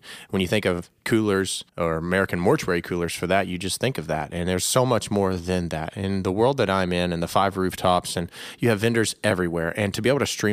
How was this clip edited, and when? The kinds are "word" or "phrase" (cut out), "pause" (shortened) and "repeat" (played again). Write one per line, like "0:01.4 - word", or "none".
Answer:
0:01.7 - pause